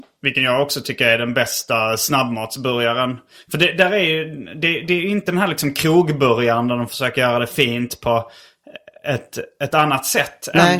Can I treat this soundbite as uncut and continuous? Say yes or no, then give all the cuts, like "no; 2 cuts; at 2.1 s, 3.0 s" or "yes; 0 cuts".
yes; 0 cuts